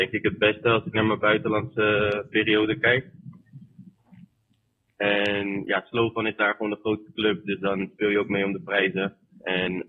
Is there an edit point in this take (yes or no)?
no